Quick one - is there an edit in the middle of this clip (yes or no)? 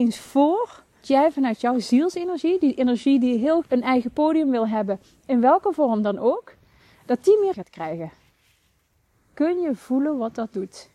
yes